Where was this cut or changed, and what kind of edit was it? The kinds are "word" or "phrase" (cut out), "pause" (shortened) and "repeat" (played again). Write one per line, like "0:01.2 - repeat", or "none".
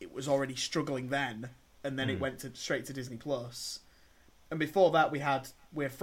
none